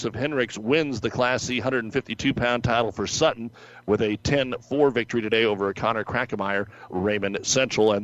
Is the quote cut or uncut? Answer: cut